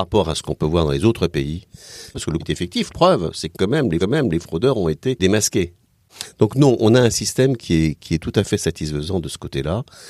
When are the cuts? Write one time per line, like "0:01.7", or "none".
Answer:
0:02.4
0:02.9
0:04.0